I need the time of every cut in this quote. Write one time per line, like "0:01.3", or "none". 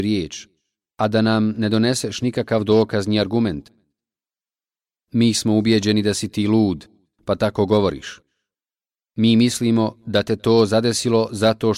none